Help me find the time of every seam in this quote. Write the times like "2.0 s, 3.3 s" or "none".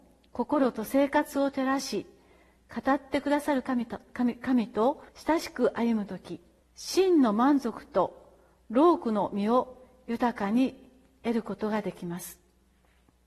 5.1 s, 6.6 s

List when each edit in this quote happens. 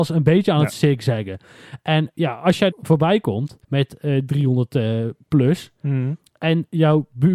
2.1 s, 2.7 s, 3.6 s

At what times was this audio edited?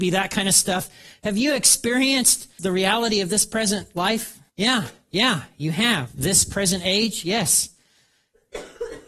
2.6 s, 4.5 s

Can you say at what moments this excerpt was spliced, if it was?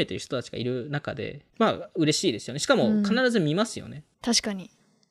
1.5 s, 4.1 s

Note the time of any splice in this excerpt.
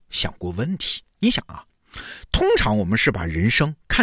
1.1 s

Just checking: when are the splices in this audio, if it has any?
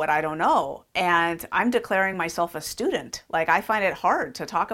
none

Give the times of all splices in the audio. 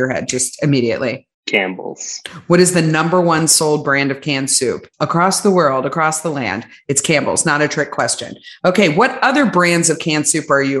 1.3 s, 4.9 s

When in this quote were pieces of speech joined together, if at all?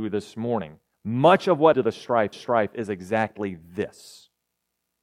0.9 s, 1.7 s, 2.3 s

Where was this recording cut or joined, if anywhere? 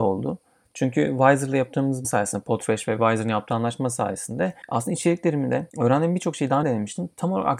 2.0 s, 4.6 s, 5.7 s, 6.6 s

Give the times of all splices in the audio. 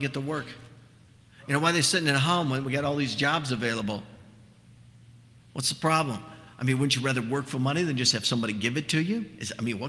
none

